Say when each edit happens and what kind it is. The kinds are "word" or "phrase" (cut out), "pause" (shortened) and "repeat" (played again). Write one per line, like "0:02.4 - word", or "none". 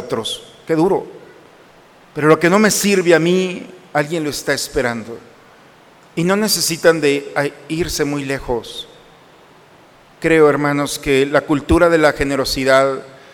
none